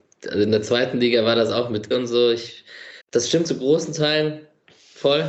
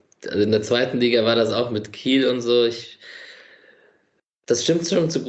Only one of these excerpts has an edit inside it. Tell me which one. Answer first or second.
first